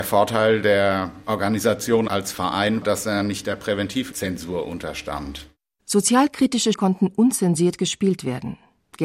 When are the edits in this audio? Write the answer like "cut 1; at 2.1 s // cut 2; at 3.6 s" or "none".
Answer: cut 1; at 2.8 s // cut 2; at 6.7 s